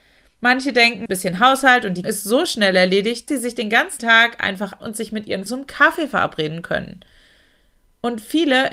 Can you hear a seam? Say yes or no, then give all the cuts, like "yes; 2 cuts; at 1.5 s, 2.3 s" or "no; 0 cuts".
yes; 6 cuts; at 1.1 s, 2.0 s, 3.3 s, 4.0 s, 4.8 s, 5.5 s